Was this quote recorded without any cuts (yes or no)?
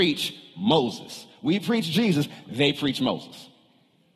yes